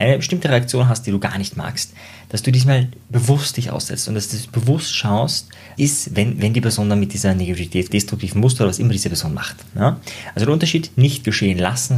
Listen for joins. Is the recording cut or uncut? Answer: cut